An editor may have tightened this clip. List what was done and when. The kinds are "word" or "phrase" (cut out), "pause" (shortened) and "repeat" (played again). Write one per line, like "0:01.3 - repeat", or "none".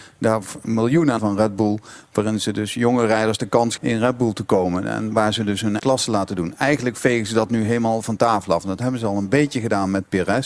0:01.2 - word
0:03.8 - phrase
0:05.8 - word